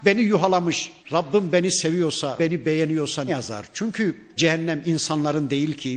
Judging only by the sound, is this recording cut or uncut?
cut